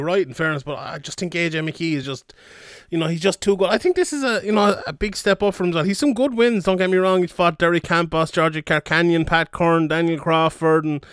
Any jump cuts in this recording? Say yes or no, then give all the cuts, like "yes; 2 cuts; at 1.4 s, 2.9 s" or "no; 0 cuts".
no; 0 cuts